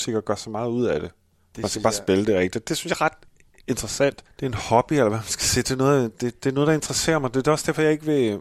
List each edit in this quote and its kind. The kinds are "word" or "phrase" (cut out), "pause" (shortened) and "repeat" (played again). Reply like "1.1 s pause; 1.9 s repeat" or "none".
none